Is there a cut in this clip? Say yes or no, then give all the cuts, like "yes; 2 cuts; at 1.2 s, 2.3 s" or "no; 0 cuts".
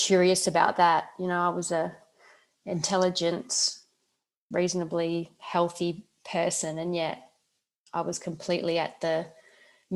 no; 0 cuts